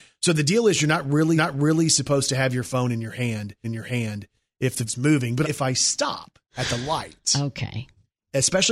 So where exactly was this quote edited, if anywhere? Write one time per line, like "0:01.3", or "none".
0:01.4
0:03.6
0:04.9
0:05.4
0:06.5